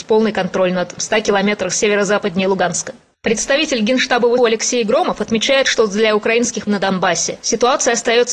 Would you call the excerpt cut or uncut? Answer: cut